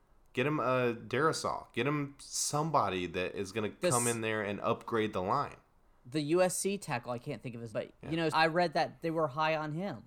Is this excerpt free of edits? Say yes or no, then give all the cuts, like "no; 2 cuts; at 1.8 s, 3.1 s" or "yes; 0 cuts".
no; 2 cuts; at 7.7 s, 8.3 s